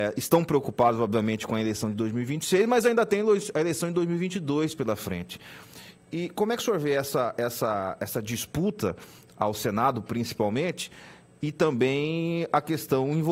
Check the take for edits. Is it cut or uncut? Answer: uncut